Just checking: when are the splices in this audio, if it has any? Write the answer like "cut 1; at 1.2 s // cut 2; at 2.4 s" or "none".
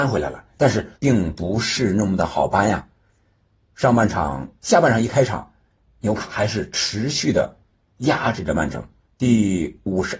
cut 1; at 1.0 s // cut 2; at 5.8 s // cut 3; at 9.1 s